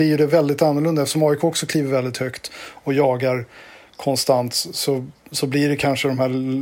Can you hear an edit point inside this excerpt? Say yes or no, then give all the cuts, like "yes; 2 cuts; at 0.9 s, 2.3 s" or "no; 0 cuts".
no; 0 cuts